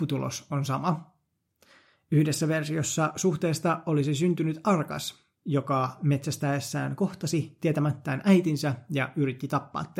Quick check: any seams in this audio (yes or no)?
no